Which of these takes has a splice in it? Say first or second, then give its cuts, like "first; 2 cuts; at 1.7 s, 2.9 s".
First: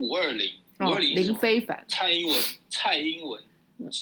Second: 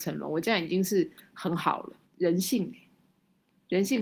second; 1 cut; at 2.0 s